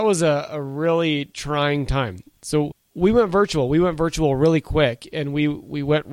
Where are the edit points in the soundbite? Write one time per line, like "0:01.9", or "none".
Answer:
none